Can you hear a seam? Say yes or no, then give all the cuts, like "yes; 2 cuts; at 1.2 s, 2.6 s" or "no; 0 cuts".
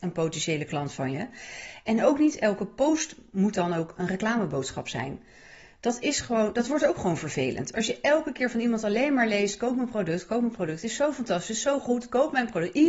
no; 0 cuts